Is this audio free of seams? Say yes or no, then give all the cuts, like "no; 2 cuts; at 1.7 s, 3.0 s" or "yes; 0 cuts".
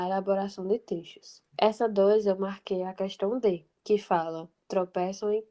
no; 2 cuts; at 1.5 s, 3.7 s